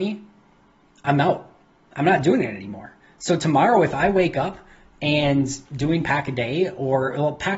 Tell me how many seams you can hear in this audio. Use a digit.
1